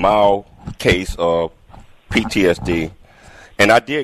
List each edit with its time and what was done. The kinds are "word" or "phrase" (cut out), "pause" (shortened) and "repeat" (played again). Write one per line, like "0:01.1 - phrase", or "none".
none